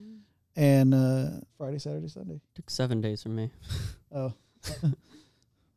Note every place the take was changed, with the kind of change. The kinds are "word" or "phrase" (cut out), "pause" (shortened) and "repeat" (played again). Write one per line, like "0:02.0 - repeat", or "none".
0:01.5 - pause
0:02.5 - pause

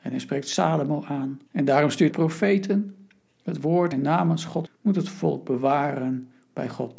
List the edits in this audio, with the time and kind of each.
0:01.5 - pause
0:02.1 - word
0:03.9 - phrase
0:04.7 - word

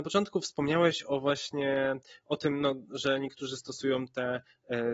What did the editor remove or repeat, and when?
none

